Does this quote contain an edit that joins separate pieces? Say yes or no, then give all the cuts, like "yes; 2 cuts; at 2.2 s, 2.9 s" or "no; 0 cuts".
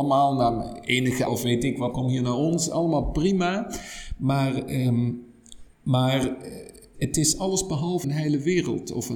yes; 5 cuts; at 1.3 s, 1.9 s, 5.7 s, 6.9 s, 8.0 s